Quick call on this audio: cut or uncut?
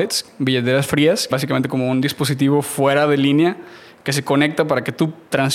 cut